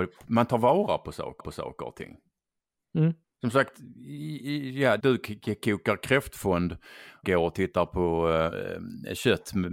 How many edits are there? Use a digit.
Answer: 5